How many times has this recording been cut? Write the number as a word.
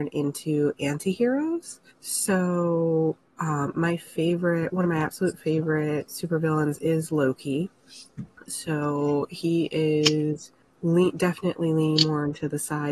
three